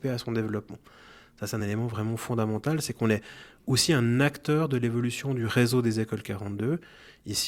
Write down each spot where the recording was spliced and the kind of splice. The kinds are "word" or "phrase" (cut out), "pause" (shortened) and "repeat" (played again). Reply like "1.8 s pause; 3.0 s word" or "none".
none

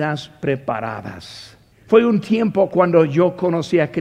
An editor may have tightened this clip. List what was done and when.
1.7 s pause

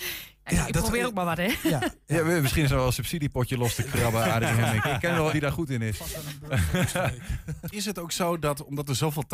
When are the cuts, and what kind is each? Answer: 5.3 s word; 7.7 s word

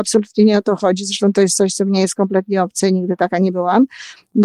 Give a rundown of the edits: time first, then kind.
none

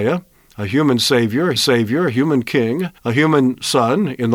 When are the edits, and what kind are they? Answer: 1.6 s repeat; 3.0 s pause

